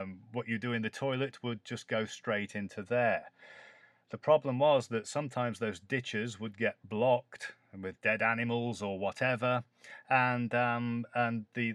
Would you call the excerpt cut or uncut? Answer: uncut